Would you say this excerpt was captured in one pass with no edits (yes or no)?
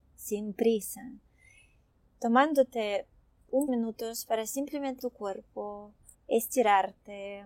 no